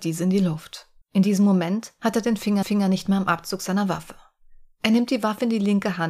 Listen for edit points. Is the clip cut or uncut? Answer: cut